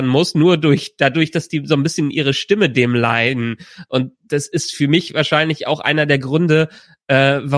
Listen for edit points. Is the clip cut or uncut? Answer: uncut